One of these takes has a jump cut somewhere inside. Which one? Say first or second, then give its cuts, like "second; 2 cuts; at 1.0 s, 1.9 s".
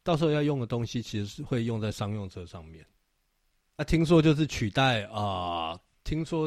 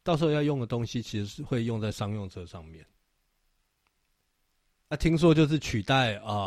first; 1 cut; at 3.5 s